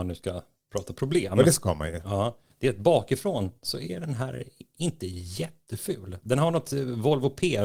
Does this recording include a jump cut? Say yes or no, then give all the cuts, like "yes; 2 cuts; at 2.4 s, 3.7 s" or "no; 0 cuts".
no; 0 cuts